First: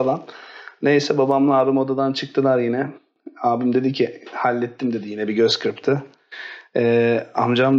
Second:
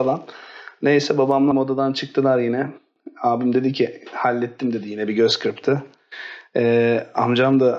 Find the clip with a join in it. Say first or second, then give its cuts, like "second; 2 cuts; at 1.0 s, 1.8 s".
second; 1 cut; at 1.5 s